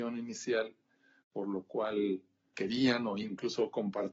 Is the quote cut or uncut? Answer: cut